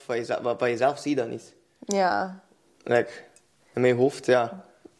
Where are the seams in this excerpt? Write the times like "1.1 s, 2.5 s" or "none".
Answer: none